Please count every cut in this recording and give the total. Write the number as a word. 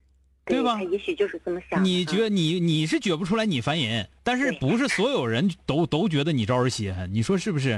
one